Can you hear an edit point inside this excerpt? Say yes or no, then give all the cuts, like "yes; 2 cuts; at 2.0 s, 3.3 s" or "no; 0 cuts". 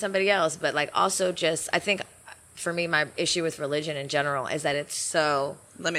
no; 0 cuts